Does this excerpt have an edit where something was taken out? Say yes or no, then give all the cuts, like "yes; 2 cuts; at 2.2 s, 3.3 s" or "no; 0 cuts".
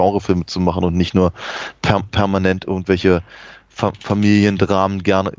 no; 0 cuts